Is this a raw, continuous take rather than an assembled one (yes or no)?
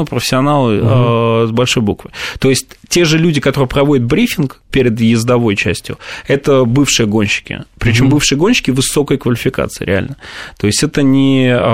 yes